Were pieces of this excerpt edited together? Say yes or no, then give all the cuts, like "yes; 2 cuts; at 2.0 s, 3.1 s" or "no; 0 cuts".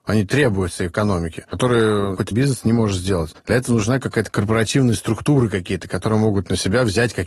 yes; 2 cuts; at 2.3 s, 4.3 s